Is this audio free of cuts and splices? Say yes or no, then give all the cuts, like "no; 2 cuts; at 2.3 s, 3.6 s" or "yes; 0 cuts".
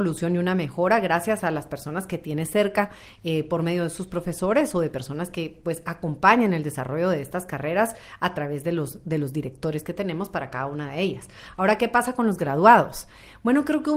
yes; 0 cuts